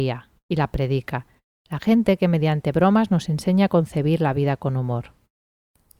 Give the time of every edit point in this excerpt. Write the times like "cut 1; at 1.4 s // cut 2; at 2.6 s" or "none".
none